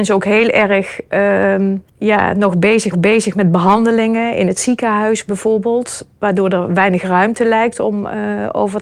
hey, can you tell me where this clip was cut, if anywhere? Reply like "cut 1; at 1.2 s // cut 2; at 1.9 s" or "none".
cut 1; at 1.9 s // cut 2; at 2.9 s